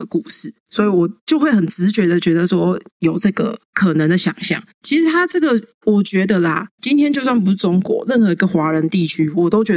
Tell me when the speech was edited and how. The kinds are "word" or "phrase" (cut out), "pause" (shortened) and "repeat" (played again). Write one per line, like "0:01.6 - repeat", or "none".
none